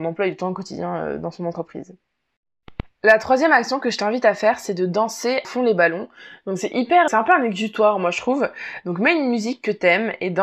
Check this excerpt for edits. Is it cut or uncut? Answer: cut